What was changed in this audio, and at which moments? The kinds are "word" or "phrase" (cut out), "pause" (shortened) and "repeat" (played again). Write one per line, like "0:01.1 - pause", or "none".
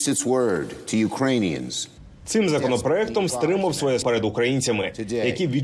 0:03.3 - word
0:04.0 - word